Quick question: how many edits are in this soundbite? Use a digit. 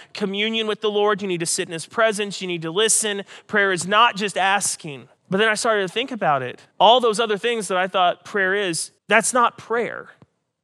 3